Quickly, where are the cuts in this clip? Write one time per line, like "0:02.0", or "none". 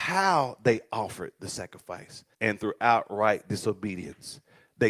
0:02.3